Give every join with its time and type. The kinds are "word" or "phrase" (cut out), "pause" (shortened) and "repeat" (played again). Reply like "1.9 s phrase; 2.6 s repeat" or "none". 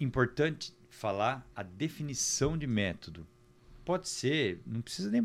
1.5 s pause